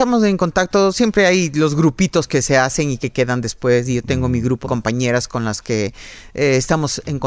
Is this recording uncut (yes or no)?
no